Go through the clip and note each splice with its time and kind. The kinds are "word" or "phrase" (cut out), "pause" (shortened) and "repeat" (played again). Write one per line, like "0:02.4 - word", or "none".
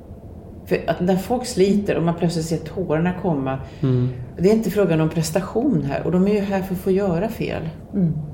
none